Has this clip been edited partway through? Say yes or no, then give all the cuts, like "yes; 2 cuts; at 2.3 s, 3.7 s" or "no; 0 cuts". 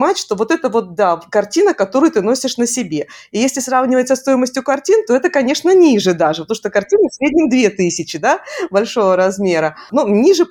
no; 0 cuts